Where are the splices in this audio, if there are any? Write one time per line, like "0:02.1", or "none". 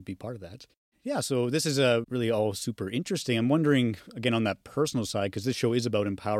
0:02.0